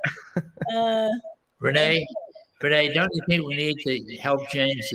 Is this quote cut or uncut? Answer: uncut